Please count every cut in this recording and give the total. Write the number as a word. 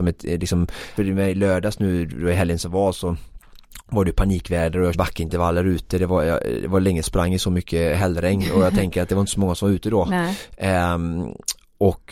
three